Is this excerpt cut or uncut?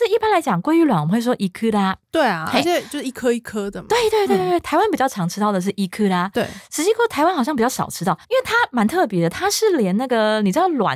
cut